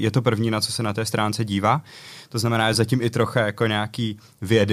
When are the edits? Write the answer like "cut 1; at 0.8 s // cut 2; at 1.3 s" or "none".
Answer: none